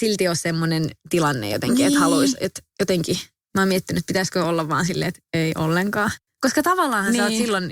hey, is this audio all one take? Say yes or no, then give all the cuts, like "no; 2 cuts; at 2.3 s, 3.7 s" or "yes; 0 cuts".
yes; 0 cuts